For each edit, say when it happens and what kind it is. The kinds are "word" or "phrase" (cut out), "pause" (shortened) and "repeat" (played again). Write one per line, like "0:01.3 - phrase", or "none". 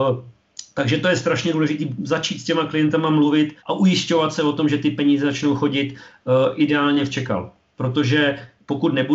0:03.6 - pause
0:07.1 - phrase